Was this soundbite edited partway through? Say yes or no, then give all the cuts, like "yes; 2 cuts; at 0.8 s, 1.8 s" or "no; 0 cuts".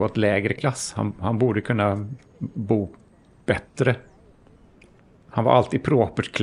no; 0 cuts